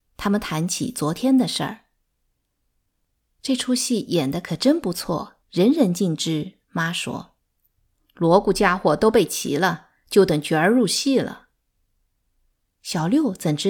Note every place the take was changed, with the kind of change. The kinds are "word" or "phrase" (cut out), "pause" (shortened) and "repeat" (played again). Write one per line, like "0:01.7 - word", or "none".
0:05.4 - pause
0:06.6 - pause
0:07.4 - pause